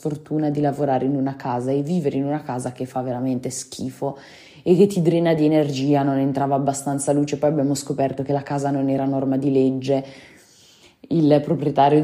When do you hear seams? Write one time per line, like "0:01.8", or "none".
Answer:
none